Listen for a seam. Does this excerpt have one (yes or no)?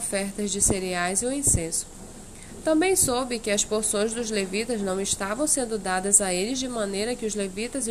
no